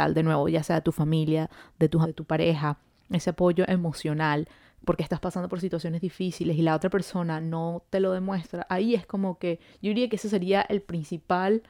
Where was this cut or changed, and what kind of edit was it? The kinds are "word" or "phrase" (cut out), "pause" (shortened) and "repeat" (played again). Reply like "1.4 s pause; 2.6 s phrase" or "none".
2.0 s word